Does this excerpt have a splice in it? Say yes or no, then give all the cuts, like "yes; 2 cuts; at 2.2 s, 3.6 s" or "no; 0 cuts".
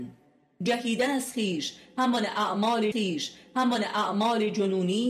yes; 1 cut; at 2.9 s